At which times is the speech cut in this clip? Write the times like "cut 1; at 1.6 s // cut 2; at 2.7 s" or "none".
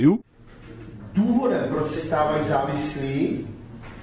cut 1; at 2.0 s